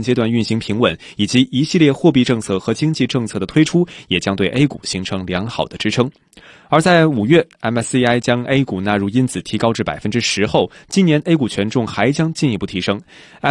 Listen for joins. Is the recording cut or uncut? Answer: uncut